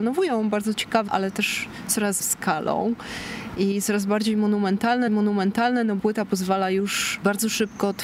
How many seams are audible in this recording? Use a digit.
4